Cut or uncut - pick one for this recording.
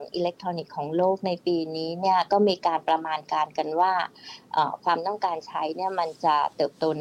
uncut